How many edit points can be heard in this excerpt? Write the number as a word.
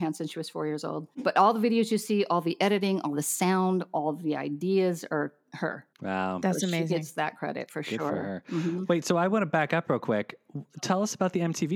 two